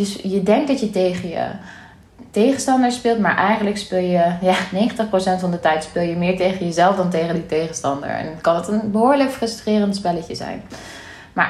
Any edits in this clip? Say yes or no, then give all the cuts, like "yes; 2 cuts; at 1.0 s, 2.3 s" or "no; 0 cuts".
no; 0 cuts